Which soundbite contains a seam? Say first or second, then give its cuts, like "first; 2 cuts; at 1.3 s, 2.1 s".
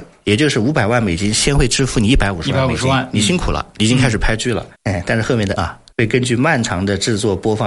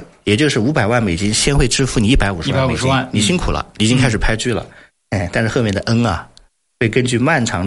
first; 3 cuts; at 4.7 s, 5.6 s, 5.9 s